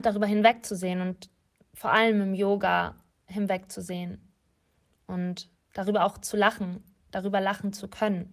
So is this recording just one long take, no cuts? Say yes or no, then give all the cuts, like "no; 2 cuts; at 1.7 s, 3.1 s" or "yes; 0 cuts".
yes; 0 cuts